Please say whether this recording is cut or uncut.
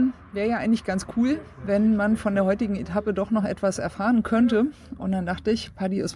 uncut